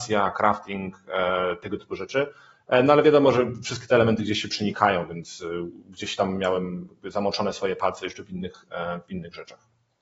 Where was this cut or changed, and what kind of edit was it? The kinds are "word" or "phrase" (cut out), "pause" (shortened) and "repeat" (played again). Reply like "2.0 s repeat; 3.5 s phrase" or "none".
none